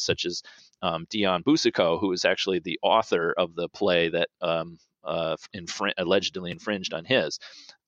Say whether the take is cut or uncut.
uncut